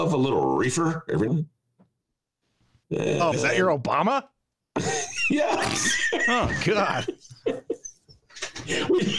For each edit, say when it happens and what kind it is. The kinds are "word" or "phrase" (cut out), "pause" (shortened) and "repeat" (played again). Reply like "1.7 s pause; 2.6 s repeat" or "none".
1.3 s word; 3.3 s word